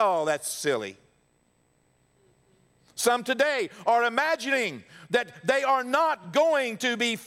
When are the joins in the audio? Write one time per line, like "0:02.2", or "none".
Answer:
none